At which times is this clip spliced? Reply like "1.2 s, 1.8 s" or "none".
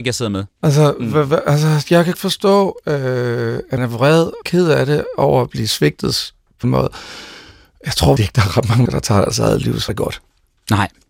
2.1 s, 3.8 s, 4.4 s, 6.6 s, 8.2 s, 8.9 s, 9.9 s